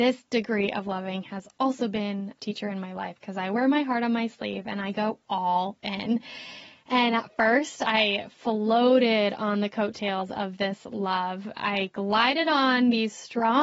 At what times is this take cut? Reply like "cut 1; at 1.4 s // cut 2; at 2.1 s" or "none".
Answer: cut 1; at 2.4 s